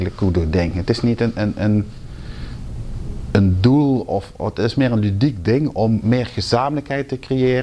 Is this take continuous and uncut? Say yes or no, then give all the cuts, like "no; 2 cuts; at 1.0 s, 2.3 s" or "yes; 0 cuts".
yes; 0 cuts